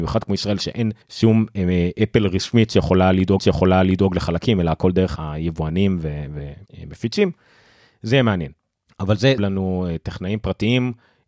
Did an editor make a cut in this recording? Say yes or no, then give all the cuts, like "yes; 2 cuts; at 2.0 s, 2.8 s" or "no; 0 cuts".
yes; 6 cuts; at 1.0 s, 3.4 s, 5.2 s, 6.7 s, 8.6 s, 9.4 s